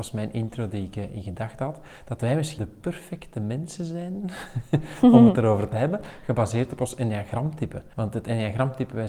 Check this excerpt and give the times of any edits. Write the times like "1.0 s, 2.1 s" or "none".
2.6 s, 7.9 s